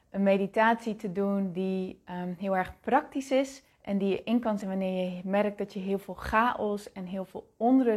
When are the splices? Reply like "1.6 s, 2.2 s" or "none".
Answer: 3.7 s, 4.6 s